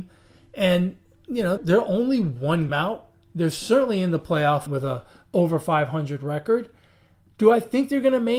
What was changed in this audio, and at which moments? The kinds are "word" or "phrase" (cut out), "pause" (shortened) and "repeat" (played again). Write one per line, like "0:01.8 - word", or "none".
0:01.6 - word
0:02.7 - word
0:04.7 - word